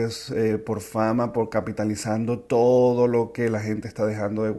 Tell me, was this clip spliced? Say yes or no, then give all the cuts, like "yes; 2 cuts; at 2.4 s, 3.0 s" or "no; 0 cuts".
no; 0 cuts